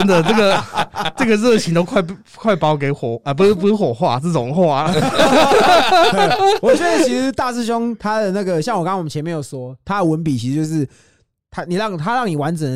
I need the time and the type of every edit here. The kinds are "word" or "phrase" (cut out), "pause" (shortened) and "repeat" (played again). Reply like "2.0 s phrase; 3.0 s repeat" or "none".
none

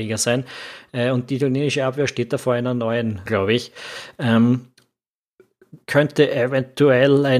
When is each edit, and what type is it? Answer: 3.3 s word; 5.8 s pause

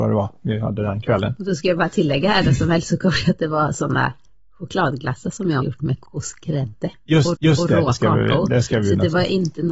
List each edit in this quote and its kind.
5.6 s phrase; 6.1 s pause; 7.3 s repeat

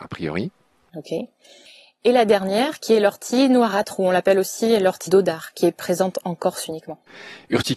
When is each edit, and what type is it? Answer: 5.1 s word

